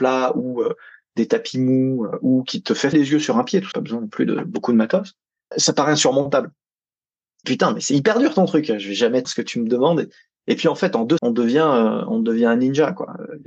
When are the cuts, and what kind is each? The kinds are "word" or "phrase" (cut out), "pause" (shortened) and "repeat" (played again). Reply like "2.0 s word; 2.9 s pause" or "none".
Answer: 2.9 s word; 3.7 s word; 5.5 s word; 7.4 s word; 9.2 s word; 11.2 s word